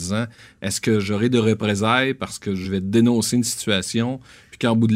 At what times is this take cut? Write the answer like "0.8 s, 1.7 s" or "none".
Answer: none